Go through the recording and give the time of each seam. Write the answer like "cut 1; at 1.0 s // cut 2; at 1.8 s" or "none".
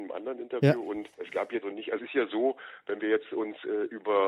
cut 1; at 1.1 s // cut 2; at 1.6 s // cut 3; at 2.0 s